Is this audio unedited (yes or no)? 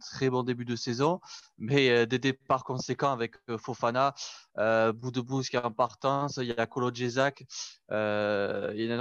yes